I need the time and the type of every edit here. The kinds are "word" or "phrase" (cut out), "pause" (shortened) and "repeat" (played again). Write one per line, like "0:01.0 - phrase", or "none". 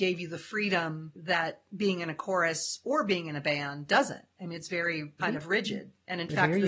0:05.2 - phrase